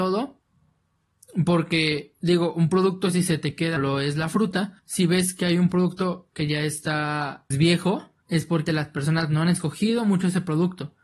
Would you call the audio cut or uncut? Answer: cut